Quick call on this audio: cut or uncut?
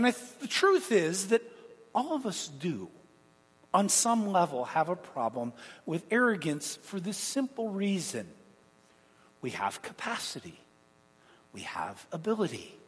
uncut